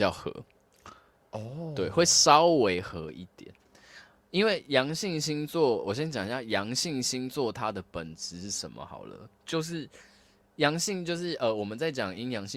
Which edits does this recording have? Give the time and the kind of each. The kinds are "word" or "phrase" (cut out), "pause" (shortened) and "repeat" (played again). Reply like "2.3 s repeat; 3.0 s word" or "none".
none